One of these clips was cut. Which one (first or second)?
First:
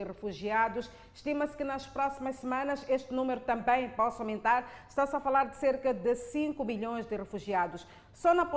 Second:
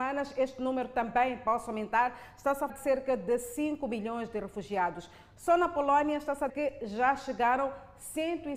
second